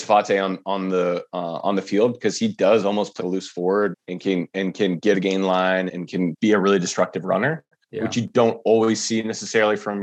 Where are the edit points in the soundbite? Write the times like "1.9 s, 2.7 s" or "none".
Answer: 3.2 s, 3.9 s, 5.1 s, 5.9 s, 6.3 s